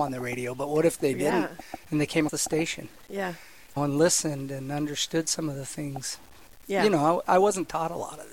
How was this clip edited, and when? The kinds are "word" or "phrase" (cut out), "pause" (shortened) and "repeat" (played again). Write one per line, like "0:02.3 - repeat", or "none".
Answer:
0:02.3 - word
0:03.8 - phrase

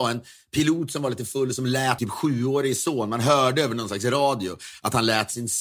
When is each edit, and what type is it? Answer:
0:02.0 - word

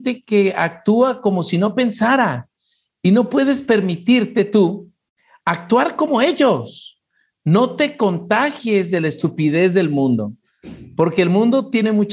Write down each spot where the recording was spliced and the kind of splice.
none

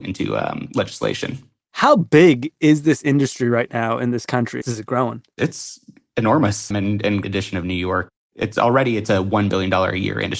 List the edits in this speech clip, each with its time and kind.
0:04.6 - phrase
0:06.7 - word
0:07.2 - phrase

